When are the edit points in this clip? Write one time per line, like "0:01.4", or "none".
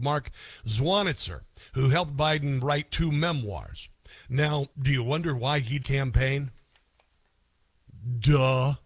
0:04.7
0:05.8